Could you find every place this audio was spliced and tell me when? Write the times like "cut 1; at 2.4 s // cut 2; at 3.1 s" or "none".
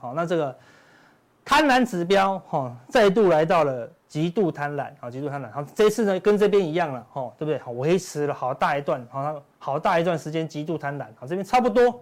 none